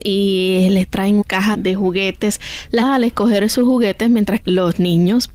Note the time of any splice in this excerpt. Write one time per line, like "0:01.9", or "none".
0:01.2
0:01.5
0:02.8
0:04.4

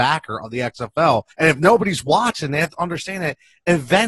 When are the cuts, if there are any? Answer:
0:01.3

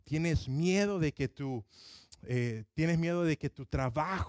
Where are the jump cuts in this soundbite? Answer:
none

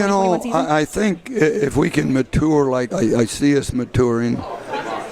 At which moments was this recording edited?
0:02.9

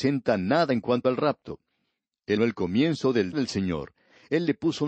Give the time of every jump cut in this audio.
0:02.4
0:03.3

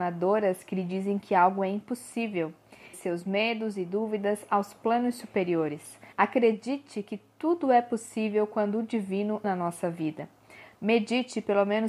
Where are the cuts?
0:02.9
0:06.1
0:09.4

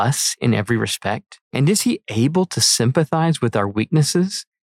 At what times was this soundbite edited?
0:01.4

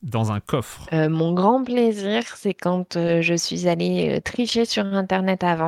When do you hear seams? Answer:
none

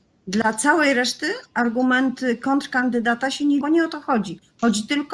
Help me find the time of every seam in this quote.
0:03.6

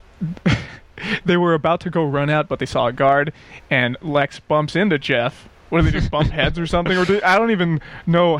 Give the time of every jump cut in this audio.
none

